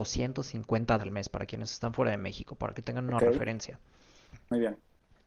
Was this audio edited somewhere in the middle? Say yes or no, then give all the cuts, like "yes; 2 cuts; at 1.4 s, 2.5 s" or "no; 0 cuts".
yes; 1 cut; at 1.0 s